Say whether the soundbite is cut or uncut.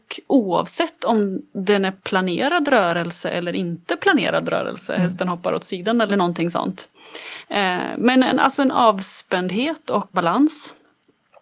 cut